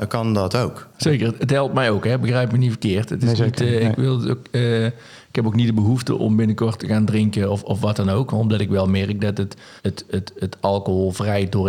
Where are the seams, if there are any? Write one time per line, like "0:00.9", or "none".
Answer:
0:09.8